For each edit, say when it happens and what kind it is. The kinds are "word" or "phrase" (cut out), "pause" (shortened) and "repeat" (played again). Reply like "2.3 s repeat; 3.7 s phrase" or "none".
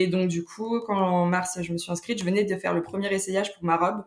none